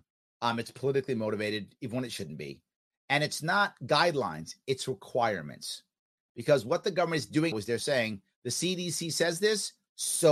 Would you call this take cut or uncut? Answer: cut